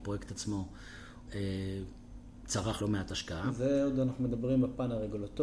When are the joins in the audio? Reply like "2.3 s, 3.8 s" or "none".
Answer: 1.3 s, 2.8 s